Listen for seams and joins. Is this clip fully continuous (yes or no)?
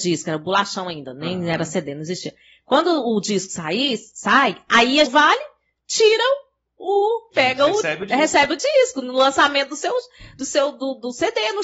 no